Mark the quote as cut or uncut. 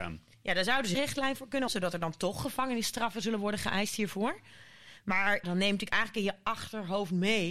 cut